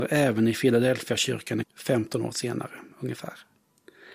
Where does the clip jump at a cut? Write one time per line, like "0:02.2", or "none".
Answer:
0:01.6